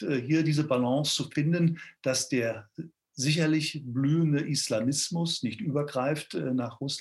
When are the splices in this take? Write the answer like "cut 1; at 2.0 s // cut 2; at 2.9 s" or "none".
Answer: none